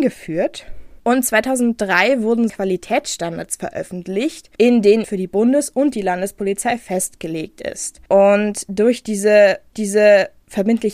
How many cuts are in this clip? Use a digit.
5